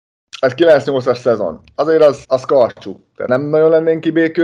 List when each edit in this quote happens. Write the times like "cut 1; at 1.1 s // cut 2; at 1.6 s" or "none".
cut 1; at 2.2 s // cut 2; at 3.3 s